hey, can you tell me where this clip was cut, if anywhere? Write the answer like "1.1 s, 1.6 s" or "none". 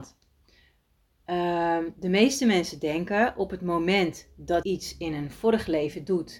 4.6 s